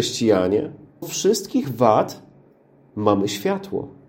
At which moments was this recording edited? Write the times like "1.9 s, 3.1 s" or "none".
1.0 s, 1.6 s